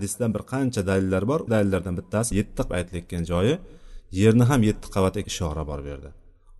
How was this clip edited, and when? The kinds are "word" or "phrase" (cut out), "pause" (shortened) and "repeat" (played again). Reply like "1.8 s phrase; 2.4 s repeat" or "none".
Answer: 1.5 s word; 2.3 s word; 2.7 s phrase; 5.2 s word